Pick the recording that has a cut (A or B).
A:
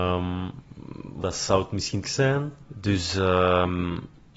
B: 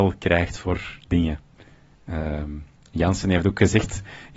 A